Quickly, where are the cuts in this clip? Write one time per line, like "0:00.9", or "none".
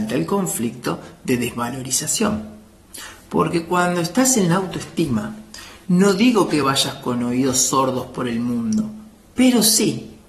none